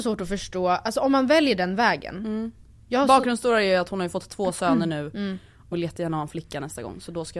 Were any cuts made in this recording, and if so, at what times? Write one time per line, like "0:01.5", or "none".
0:05.7